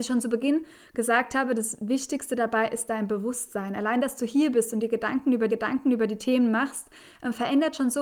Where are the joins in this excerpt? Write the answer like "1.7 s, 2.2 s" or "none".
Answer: 5.5 s